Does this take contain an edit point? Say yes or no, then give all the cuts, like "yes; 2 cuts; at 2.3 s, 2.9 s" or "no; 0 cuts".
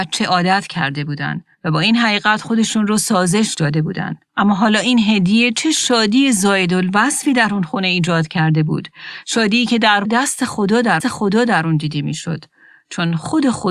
yes; 4 cuts; at 1.5 s, 4.2 s, 10.0 s, 11.0 s